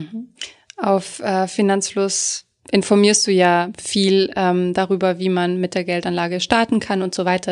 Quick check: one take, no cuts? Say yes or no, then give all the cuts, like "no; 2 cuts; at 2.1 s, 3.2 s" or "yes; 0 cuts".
yes; 0 cuts